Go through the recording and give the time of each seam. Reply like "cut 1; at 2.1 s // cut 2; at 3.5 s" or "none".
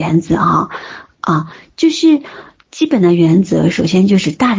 none